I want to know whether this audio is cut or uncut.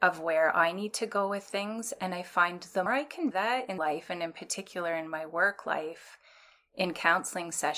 cut